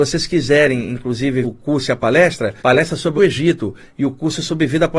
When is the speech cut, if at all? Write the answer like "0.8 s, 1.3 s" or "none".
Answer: 1.4 s, 2.6 s, 3.2 s